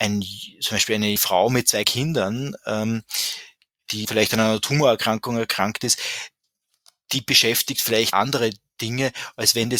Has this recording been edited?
yes; 4 cuts; at 1.2 s, 1.8 s, 4.0 s, 8.1 s

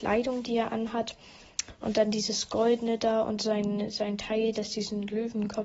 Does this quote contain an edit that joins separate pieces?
no; 0 cuts

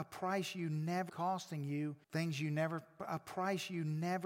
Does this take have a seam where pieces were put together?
yes; 2 cuts; at 1.1 s, 2.0 s

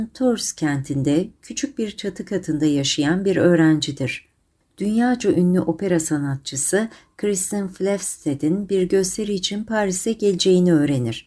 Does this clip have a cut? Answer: no; 0 cuts

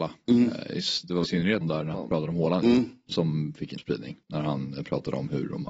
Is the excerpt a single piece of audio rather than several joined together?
no; 5 cuts; at 1.2 s, 1.6 s, 1.9 s, 3.8 s, 4.2 s

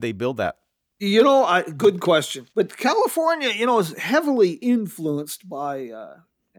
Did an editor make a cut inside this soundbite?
yes; 1 cut; at 2.5 s

